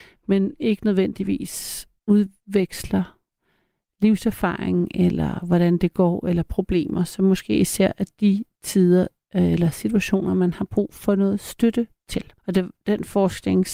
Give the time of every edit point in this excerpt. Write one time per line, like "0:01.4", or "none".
0:02.0
0:12.4